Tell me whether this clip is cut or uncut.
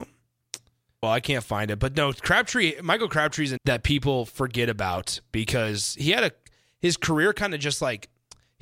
cut